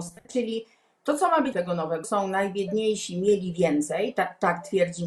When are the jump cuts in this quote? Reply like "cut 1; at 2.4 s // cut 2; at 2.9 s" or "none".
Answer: cut 1; at 1.5 s // cut 2; at 2.0 s

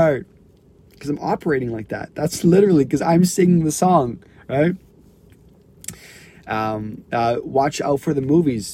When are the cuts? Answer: cut 1; at 7.0 s

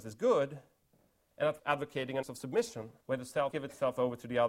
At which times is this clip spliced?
cut 1; at 1.6 s // cut 2; at 2.2 s // cut 3; at 3.0 s // cut 4; at 3.5 s

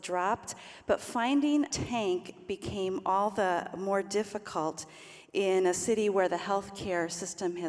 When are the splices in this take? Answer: cut 1; at 1.7 s

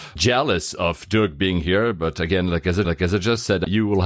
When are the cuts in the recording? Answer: cut 1; at 2.8 s

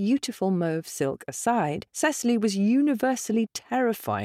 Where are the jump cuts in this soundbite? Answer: cut 1; at 1.9 s

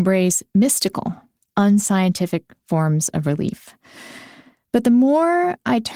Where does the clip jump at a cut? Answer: none

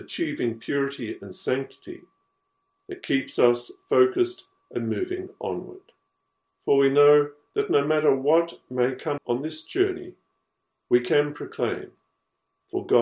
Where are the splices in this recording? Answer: cut 1; at 6.2 s // cut 2; at 9.2 s

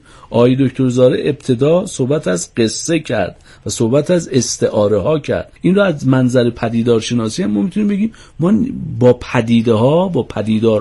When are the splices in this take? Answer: cut 1; at 5.6 s

